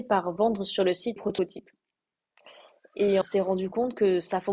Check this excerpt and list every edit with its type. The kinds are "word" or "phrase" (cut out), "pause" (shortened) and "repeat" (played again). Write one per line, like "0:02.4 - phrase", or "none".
0:01.2 - phrase
0:03.2 - word